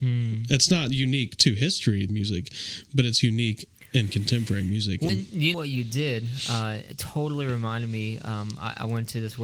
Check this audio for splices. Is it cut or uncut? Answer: cut